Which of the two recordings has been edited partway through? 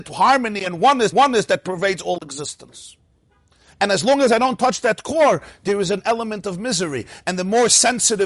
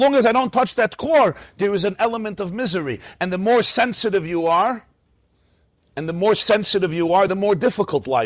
first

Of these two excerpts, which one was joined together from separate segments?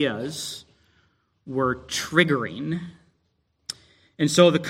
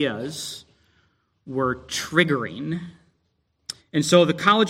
second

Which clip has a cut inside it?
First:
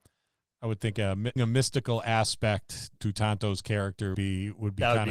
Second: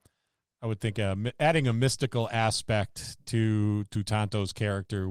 first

